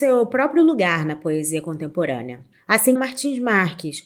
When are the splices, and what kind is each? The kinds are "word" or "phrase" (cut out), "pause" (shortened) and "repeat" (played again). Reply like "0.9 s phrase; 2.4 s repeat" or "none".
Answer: 3.0 s phrase